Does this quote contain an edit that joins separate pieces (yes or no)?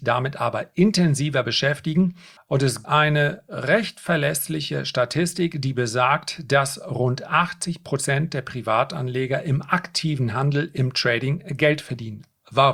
yes